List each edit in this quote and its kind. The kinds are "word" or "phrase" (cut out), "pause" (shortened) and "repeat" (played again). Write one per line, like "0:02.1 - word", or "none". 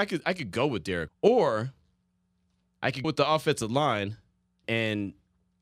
0:01.1 - word
0:03.0 - word
0:04.6 - word